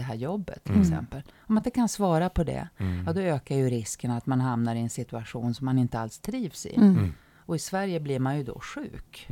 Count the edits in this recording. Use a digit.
0